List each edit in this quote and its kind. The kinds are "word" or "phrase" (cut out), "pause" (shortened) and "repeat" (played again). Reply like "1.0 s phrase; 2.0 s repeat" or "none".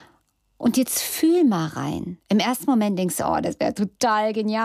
2.2 s pause